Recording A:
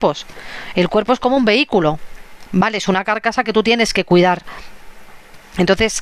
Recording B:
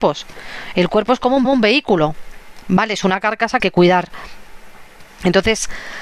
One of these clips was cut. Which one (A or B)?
B